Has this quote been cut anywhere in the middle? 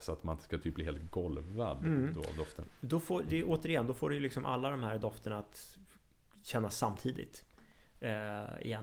no; 0 cuts

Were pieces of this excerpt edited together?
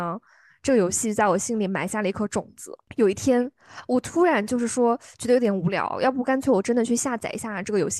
no; 0 cuts

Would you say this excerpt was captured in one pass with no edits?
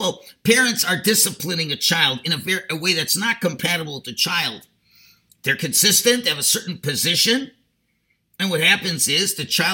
yes; 0 cuts

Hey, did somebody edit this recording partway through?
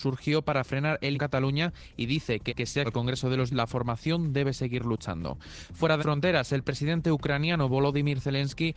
yes; 5 cuts; at 1.1 s, 2.5 s, 2.8 s, 3.5 s, 6.0 s

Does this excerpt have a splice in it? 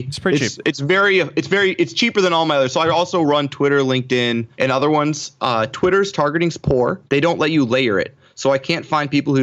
yes; 2 cuts; at 4.5 s, 7.1 s

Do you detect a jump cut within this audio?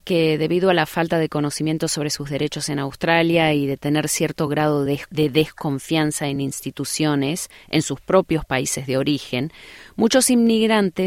no; 0 cuts

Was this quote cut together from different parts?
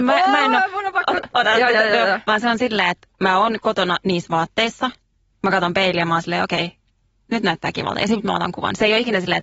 no; 0 cuts

